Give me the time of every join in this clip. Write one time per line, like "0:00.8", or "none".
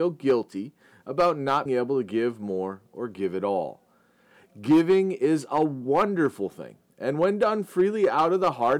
0:01.7